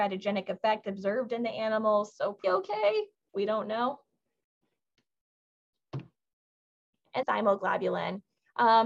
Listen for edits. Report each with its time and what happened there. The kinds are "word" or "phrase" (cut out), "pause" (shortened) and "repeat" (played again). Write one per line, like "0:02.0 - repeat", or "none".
0:02.4 - word
0:07.2 - word